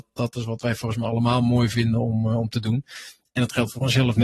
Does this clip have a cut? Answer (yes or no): no